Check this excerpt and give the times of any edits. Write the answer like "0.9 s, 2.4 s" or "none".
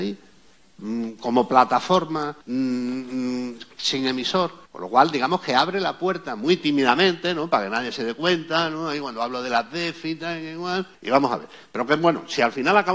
2.4 s, 4.7 s, 10.9 s

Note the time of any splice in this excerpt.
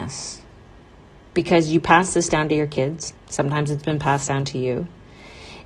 3.2 s

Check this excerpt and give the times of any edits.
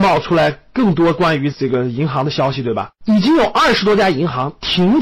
3.0 s

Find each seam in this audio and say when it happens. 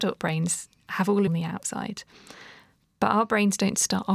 1.3 s

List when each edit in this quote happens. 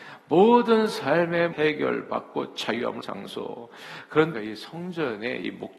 1.5 s, 3.0 s, 4.3 s

